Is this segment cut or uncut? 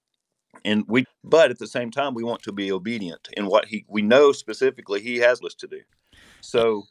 cut